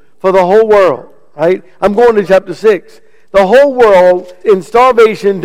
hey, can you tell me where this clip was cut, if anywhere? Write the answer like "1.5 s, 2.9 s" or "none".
2.2 s, 4.4 s